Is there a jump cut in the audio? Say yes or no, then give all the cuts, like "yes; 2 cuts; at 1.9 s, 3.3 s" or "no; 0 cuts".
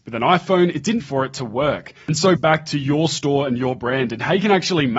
yes; 2 cuts; at 1.0 s, 2.4 s